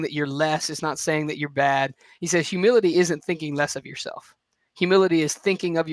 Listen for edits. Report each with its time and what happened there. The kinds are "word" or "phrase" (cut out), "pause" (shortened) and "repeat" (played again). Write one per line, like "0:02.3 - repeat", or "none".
none